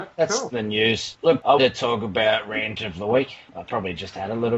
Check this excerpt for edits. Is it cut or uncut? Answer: cut